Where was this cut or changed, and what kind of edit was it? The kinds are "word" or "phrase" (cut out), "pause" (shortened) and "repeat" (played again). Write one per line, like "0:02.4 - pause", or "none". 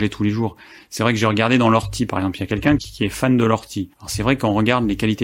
0:02.8 - word
0:03.9 - pause